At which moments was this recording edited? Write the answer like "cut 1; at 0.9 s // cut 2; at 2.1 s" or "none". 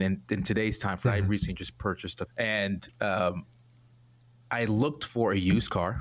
cut 1; at 1.0 s // cut 2; at 2.3 s